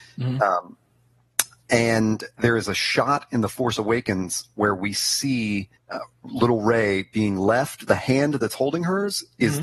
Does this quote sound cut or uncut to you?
cut